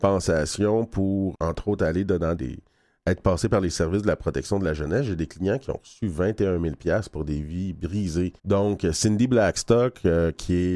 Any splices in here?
yes; 3 cuts; at 1.3 s, 2.4 s, 8.4 s

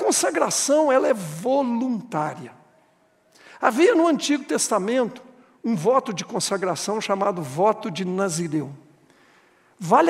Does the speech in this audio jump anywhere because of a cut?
no; 0 cuts

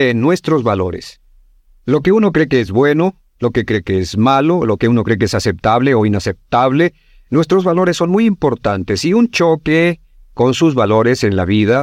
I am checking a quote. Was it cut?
no; 0 cuts

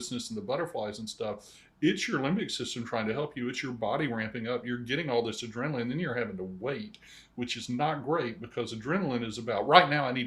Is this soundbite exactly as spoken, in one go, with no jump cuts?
yes; 0 cuts

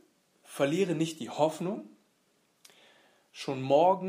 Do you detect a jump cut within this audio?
no; 0 cuts

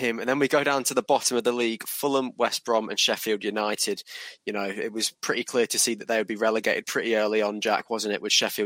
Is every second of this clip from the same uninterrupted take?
yes; 0 cuts

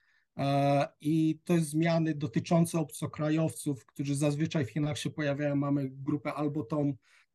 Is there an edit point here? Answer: no; 0 cuts

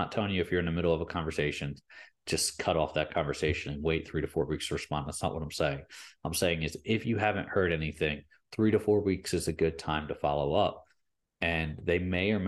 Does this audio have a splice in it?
no; 0 cuts

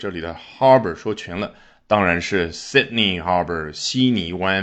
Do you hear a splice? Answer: no; 0 cuts

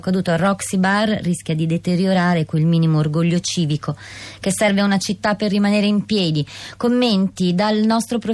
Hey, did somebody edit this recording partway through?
no; 0 cuts

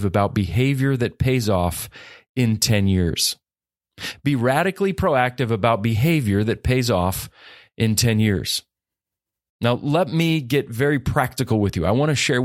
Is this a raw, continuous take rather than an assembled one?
yes; 0 cuts

